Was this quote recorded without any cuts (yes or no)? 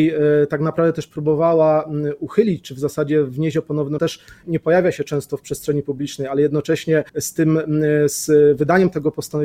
no